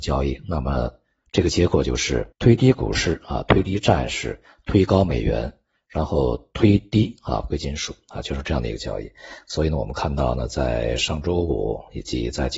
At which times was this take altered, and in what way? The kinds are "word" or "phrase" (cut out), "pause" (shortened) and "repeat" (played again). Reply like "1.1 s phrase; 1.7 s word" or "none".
2.3 s pause